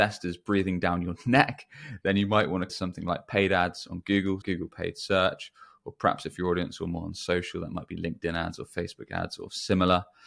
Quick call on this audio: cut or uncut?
cut